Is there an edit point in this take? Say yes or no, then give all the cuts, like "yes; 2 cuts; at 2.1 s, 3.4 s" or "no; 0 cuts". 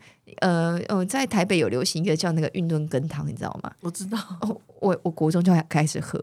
no; 0 cuts